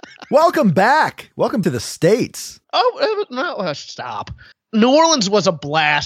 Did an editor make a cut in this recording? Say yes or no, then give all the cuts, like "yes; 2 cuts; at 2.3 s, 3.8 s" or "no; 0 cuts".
yes; 3 cuts; at 1.6 s, 2.6 s, 4.5 s